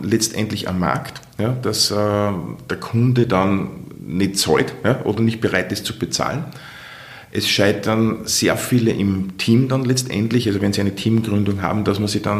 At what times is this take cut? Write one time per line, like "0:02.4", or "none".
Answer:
none